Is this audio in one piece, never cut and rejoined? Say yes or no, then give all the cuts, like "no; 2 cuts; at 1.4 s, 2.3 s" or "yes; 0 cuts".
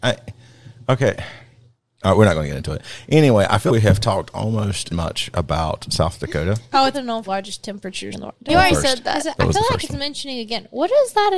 no; 6 cuts; at 3.7 s, 4.9 s, 6.9 s, 7.3 s, 8.1 s, 8.5 s